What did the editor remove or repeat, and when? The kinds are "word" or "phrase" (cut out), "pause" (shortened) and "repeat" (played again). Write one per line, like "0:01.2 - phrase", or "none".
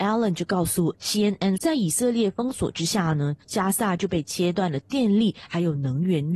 0:01.6 - word